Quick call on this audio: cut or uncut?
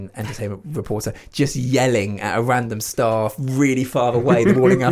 uncut